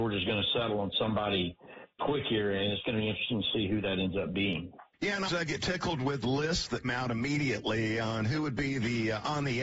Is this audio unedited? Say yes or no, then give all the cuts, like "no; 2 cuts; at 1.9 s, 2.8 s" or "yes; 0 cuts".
no; 5 cuts; at 2.0 s, 4.9 s, 5.3 s, 6.2 s, 6.8 s